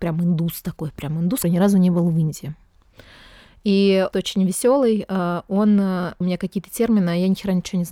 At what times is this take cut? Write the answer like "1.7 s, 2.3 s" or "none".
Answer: 1.4 s, 4.1 s, 6.2 s